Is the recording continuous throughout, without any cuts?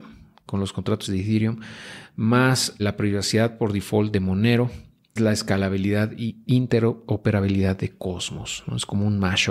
no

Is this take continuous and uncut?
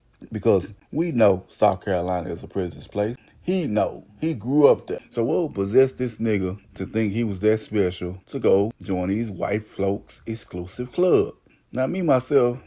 yes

